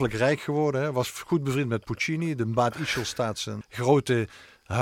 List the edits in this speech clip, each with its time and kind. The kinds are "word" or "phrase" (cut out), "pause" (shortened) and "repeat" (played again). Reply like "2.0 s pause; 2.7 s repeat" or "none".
3.6 s word